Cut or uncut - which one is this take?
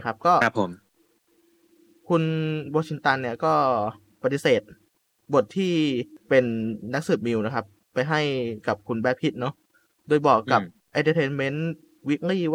uncut